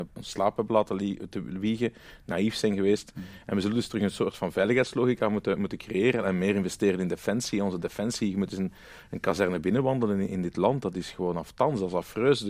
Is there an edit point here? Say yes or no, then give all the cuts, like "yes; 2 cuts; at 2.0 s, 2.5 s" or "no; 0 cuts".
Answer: no; 0 cuts